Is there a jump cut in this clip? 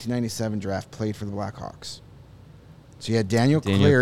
no; 0 cuts

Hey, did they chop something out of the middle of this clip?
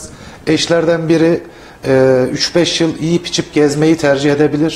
no; 0 cuts

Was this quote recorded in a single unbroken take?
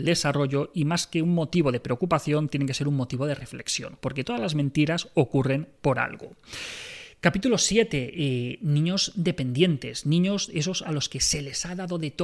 yes; 0 cuts

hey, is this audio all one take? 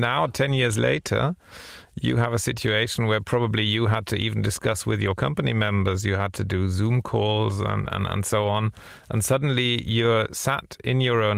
yes; 0 cuts

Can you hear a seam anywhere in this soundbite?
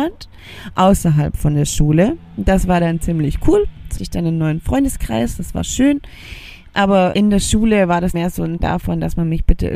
yes; 4 cuts; at 4.0 s, 7.1 s, 8.1 s, 8.6 s

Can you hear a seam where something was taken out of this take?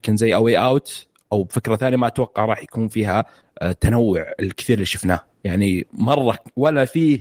no; 0 cuts

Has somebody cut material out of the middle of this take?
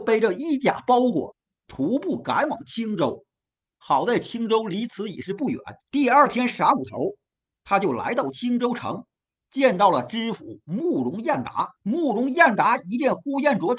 yes; 2 cuts; at 5.8 s, 11.8 s

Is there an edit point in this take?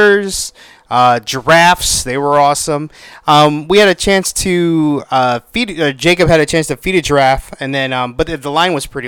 no; 0 cuts

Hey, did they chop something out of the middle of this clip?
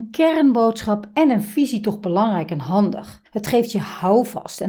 yes; 1 cut; at 3.3 s

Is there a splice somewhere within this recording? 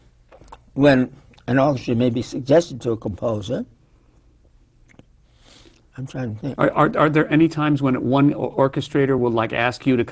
no; 0 cuts

